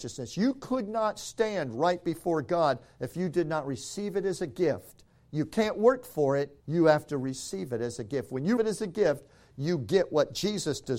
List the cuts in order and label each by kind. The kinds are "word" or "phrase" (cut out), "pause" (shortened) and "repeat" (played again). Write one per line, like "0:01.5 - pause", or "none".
0:06.6 - pause
0:08.6 - word